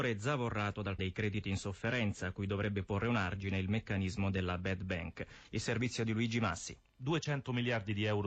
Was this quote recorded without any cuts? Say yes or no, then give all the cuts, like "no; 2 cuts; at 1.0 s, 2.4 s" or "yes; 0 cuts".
no; 1 cut; at 1.0 s